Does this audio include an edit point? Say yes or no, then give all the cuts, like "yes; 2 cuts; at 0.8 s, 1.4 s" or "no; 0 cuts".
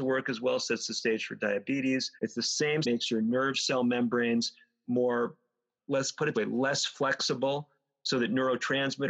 yes; 4 cuts; at 2.2 s, 2.8 s, 5.8 s, 6.3 s